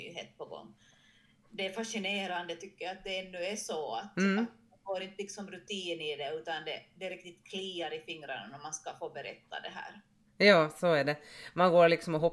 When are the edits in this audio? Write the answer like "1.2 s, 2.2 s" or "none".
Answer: none